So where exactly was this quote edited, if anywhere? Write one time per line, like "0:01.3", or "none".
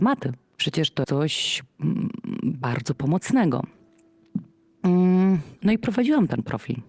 0:01.0
0:05.6